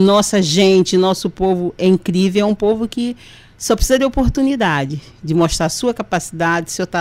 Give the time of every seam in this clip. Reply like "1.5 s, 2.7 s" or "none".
none